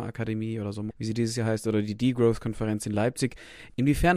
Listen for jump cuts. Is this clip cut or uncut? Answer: cut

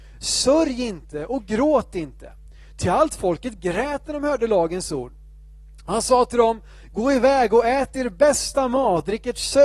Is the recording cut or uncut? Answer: uncut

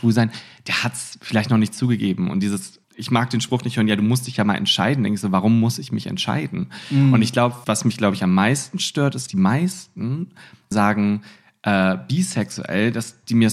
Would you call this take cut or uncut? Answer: cut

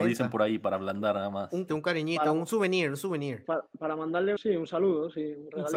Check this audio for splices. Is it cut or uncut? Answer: cut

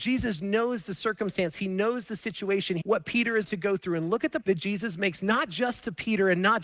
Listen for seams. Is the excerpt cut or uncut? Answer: cut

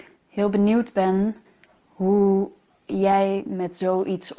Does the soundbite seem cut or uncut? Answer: uncut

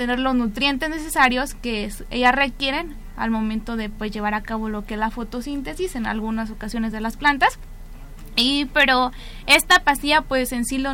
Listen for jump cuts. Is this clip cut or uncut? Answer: uncut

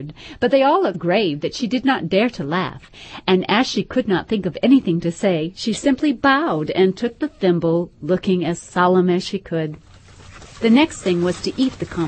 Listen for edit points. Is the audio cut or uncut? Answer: cut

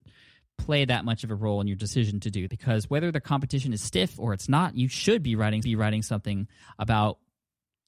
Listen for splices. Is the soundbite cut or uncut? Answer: cut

